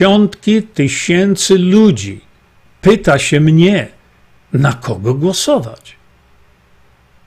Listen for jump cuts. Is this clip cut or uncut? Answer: uncut